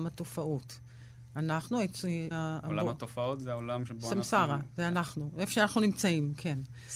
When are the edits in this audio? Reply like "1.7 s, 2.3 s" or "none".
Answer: 2.3 s

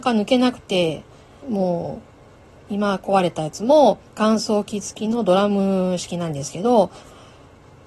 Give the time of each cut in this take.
1.4 s, 2.7 s, 4.1 s

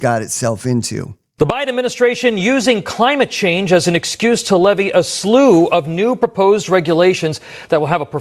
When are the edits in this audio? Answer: none

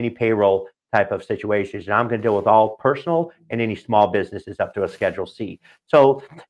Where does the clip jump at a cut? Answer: none

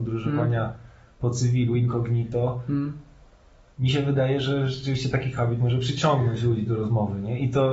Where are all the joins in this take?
none

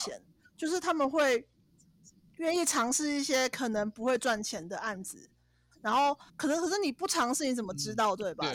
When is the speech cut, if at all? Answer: 6.3 s

